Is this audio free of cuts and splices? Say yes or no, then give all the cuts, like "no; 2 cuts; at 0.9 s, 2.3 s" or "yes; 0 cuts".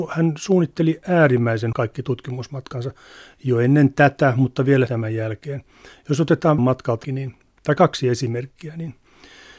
no; 4 cuts; at 1.7 s, 4.9 s, 6.6 s, 7.0 s